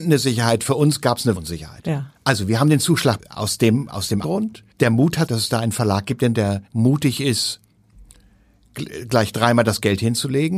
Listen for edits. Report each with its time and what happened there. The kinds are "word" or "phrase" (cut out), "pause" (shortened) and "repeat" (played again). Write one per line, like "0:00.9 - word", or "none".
0:01.4 - word
0:02.2 - pause
0:03.2 - word
0:04.2 - word
0:04.7 - pause
0:05.3 - phrase
0:06.3 - word
0:06.7 - pause